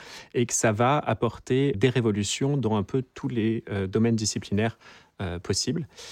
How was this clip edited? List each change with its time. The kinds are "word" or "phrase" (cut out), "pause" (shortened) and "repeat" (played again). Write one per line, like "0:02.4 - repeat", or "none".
0:01.7 - word

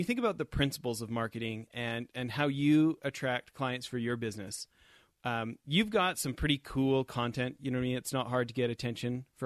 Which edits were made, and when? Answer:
none

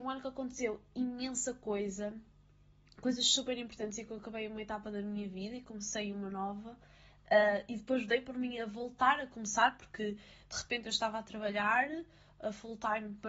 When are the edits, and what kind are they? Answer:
none

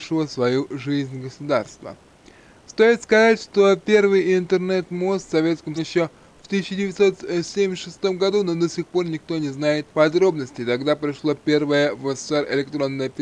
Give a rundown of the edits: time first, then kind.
0:05.8 - phrase
0:09.9 - pause

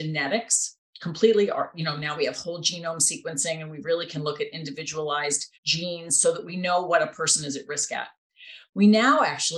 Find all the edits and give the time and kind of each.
0:05.5 - pause

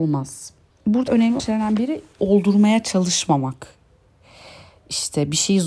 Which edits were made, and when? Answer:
0:01.1 - word
0:01.4 - word
0:02.2 - word

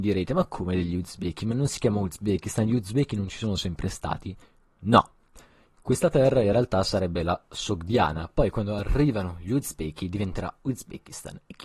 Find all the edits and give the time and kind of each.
none

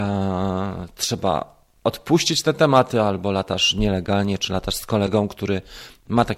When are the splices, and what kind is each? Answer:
none

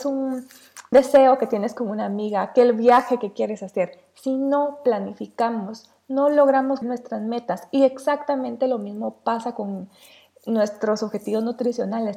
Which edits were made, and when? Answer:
0:00.9 - word
0:06.8 - word

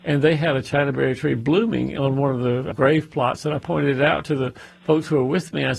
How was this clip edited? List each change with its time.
0:02.7 - word

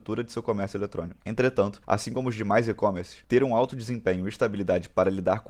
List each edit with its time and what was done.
none

